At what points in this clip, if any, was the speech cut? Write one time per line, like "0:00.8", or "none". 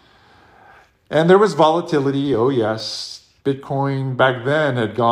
0:03.4

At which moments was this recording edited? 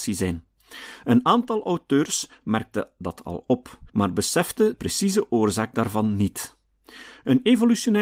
0:03.9
0:04.7

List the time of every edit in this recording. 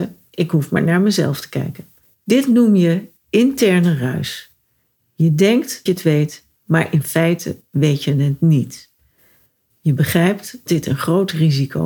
0:02.0
0:05.9
0:10.7

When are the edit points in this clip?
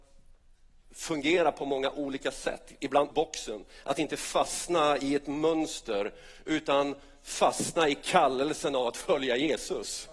0:03.1

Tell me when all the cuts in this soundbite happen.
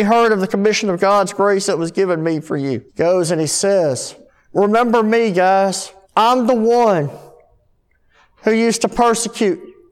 0:02.9
0:04.3
0:06.0

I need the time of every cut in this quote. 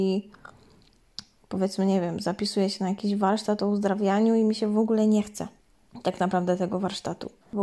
none

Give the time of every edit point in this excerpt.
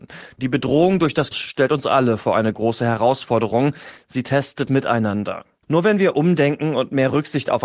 0:01.3
0:04.7

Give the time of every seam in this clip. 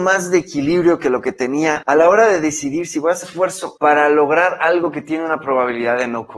0:01.8
0:03.2
0:03.8

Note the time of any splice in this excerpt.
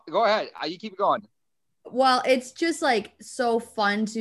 none

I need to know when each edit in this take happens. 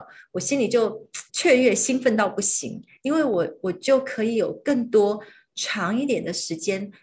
0:01.3

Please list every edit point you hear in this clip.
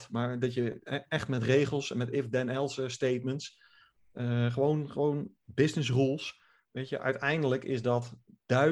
none

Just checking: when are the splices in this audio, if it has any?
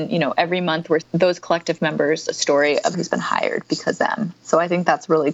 0:01.0
0:02.9
0:04.0

